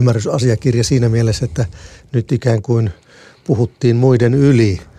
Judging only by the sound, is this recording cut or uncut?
uncut